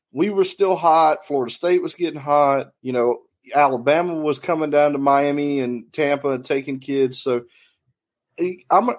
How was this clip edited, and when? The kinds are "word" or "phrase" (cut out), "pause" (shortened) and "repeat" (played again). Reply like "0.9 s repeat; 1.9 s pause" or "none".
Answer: 2.8 s pause; 3.3 s pause